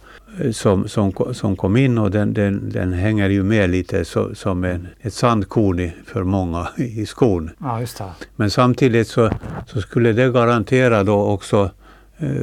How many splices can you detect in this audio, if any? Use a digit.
2